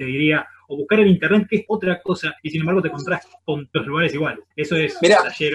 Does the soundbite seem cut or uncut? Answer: cut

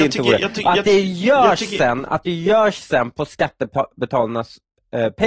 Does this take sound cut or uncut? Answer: uncut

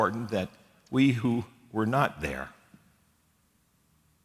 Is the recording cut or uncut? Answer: uncut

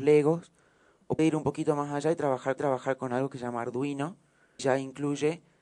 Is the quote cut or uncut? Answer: cut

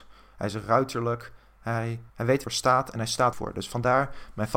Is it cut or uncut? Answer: cut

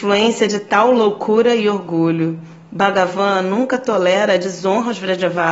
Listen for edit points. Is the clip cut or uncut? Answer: uncut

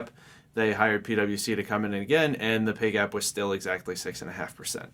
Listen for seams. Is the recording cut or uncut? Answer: uncut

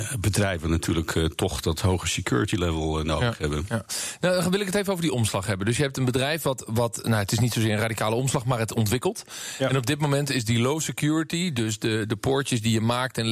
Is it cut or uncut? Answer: uncut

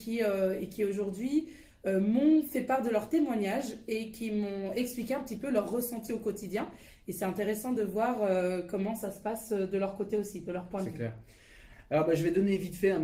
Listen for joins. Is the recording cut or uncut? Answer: uncut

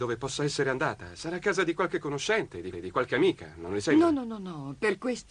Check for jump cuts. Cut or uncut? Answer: cut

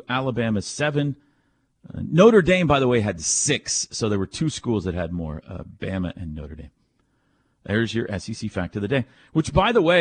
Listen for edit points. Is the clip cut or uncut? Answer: uncut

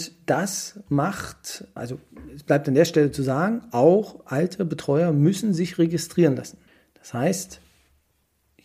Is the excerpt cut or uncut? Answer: cut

